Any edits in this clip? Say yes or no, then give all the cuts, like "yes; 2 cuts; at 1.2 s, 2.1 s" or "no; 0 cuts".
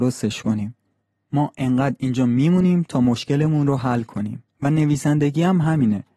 yes; 1 cut; at 4.5 s